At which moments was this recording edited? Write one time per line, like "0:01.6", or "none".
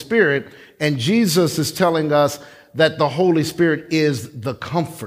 none